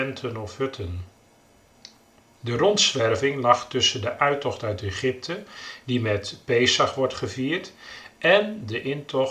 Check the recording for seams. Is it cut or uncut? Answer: uncut